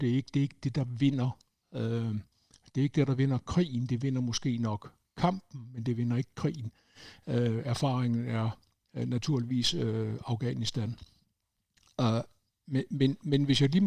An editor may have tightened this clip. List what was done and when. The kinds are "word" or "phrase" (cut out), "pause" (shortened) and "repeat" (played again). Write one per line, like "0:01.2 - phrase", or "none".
none